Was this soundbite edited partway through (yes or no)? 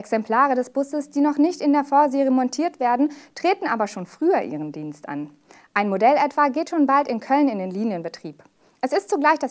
no